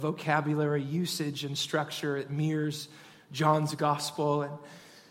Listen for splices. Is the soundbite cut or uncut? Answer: uncut